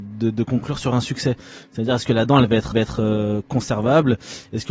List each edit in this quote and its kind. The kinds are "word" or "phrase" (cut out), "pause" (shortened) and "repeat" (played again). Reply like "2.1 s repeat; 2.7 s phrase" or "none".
2.7 s repeat